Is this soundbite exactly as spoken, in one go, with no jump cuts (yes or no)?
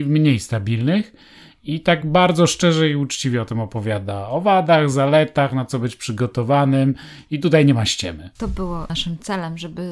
yes